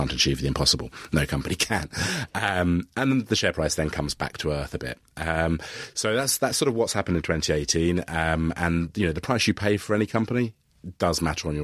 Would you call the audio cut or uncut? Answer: uncut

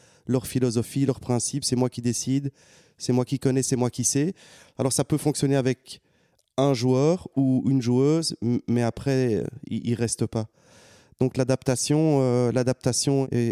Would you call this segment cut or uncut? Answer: uncut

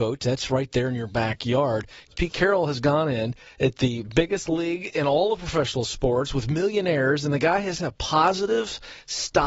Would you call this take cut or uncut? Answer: uncut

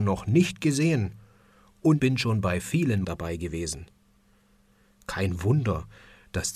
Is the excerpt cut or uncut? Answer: cut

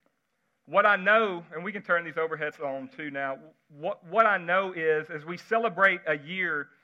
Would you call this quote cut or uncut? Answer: cut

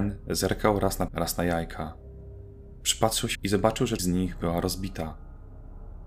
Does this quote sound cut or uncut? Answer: cut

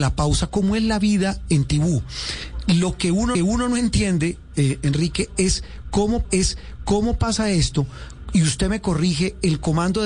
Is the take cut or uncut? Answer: cut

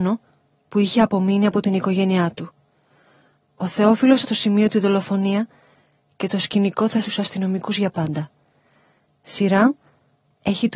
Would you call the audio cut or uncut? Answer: cut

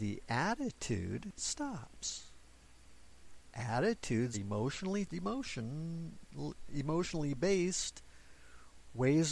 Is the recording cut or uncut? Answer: cut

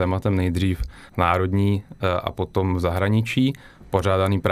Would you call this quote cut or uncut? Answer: cut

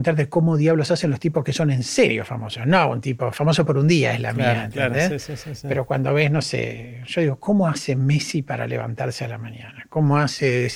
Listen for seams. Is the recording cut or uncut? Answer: uncut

